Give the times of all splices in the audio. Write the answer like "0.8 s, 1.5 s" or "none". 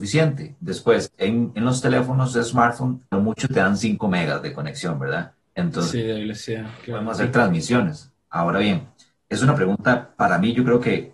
3.1 s, 5.4 s

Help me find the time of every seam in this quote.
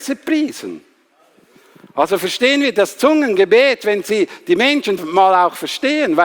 5.0 s

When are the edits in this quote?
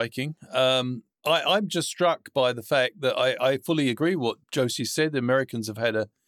1.1 s, 4.4 s

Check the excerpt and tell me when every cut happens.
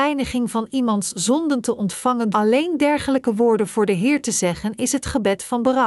2.3 s

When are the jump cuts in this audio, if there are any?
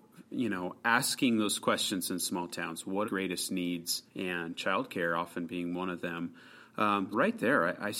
3.0 s, 4.1 s, 7.1 s

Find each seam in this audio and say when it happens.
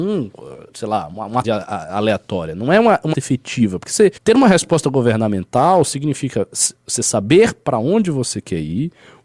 1.4 s, 3.1 s, 4.2 s

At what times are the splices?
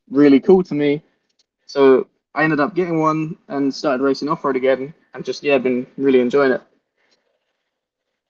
none

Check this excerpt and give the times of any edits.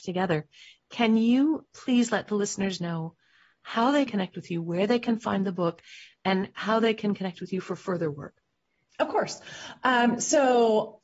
1.7 s, 4.1 s

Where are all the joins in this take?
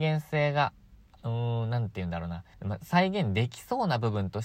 2.5 s

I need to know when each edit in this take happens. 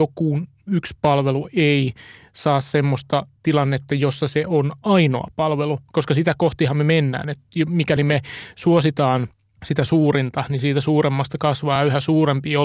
none

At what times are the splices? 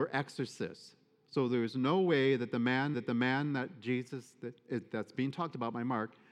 2.9 s

